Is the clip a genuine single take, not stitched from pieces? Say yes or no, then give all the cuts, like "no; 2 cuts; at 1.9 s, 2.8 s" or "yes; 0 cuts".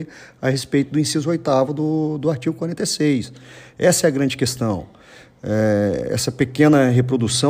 yes; 0 cuts